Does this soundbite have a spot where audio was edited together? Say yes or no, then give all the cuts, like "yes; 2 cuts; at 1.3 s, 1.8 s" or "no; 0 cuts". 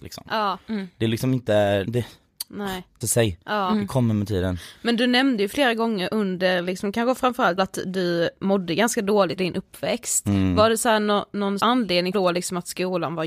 yes; 6 cuts; at 1.8 s, 3.0 s, 7.6 s, 9.4 s, 11.6 s, 12.1 s